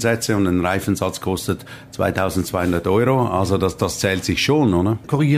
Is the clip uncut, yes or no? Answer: yes